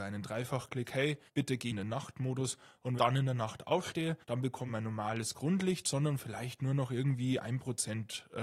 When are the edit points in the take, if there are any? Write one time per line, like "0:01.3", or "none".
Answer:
0:01.3
0:01.7
0:03.0
0:04.2
0:04.7